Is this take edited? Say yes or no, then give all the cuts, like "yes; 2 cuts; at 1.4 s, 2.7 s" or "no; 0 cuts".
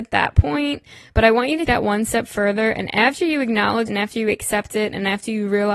yes; 2 cuts; at 1.7 s, 3.9 s